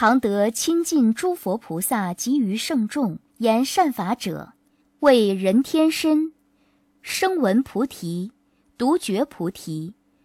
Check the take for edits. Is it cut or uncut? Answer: cut